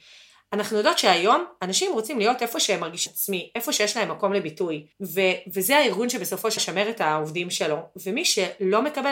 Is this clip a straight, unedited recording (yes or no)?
no